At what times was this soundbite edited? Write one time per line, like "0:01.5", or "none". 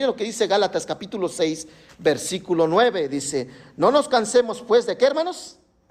none